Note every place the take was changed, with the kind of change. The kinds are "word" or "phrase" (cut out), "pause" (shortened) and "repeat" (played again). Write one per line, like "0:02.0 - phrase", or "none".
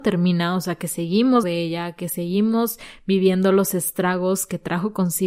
0:01.4 - word